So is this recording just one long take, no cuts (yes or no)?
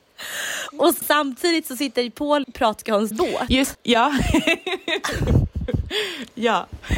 no